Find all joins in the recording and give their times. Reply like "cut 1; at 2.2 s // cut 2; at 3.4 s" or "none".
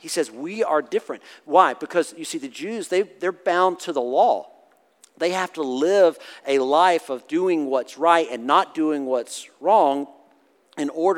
none